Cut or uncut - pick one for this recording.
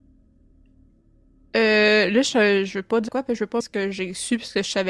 cut